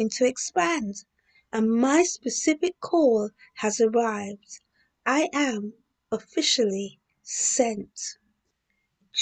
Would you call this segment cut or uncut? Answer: uncut